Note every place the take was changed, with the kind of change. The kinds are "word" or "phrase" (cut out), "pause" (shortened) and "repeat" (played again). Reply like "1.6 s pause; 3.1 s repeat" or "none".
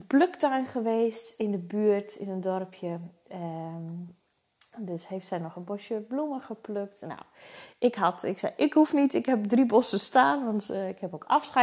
none